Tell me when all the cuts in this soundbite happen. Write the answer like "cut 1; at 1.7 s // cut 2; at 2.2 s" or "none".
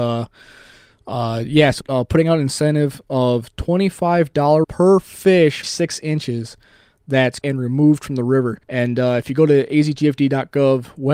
cut 1; at 1.8 s // cut 2; at 4.6 s // cut 3; at 5.6 s // cut 4; at 7.4 s // cut 5; at 8.6 s